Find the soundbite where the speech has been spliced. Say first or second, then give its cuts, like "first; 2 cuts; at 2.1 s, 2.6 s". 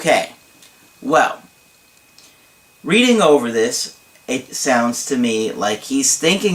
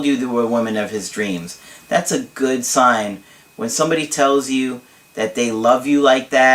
first; 1 cut; at 4.5 s